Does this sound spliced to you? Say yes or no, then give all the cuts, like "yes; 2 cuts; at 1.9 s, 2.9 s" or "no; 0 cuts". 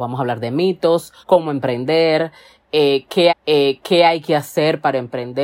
yes; 2 cuts; at 1.2 s, 3.3 s